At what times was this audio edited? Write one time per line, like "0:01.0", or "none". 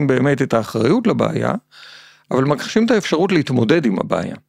none